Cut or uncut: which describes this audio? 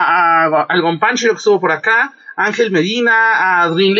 uncut